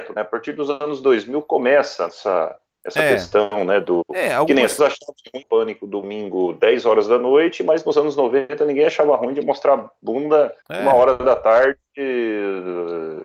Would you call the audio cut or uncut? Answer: cut